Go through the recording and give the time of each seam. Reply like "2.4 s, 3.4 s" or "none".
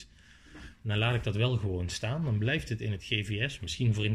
none